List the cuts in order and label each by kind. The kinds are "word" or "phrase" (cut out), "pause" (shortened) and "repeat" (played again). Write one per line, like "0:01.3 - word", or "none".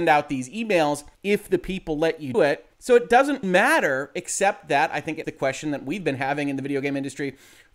0:01.1 - pause
0:02.3 - word
0:02.7 - pause
0:03.4 - word
0:05.2 - word